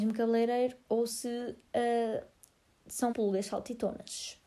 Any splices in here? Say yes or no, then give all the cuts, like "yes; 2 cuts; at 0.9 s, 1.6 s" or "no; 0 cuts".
yes; 1 cut; at 3.1 s